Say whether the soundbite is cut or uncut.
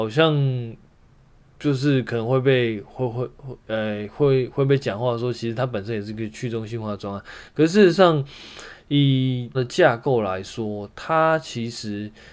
cut